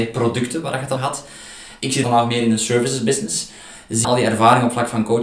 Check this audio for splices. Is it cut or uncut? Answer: cut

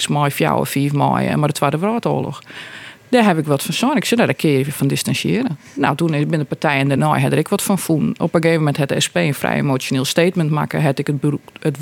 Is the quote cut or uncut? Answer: uncut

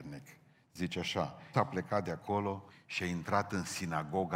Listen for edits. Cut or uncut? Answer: cut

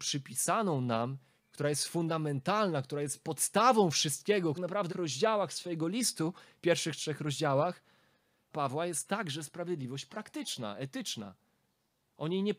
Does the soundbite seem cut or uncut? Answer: cut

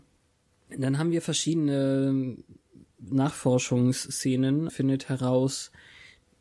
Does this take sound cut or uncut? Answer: cut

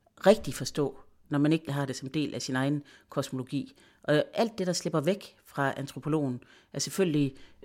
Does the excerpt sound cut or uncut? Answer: cut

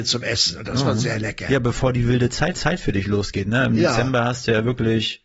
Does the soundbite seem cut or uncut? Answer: cut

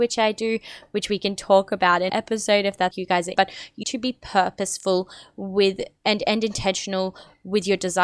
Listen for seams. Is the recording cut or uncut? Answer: cut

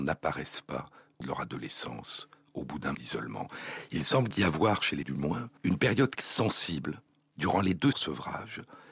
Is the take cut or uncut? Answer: cut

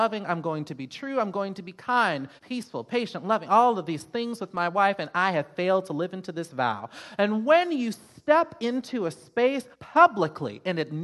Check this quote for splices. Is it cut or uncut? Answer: cut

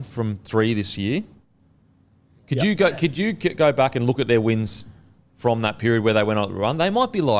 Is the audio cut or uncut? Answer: uncut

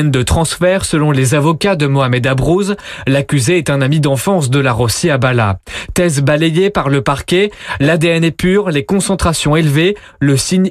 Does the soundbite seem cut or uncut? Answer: uncut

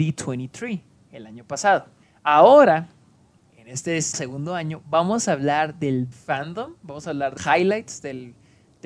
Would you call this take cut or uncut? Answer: cut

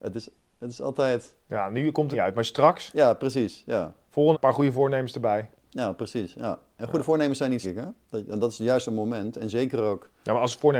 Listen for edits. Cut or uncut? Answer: cut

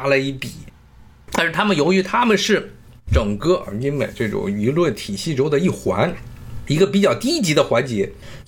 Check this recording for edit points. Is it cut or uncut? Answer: uncut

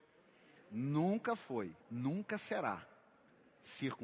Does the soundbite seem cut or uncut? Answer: cut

